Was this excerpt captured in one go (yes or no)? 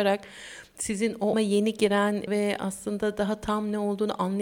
no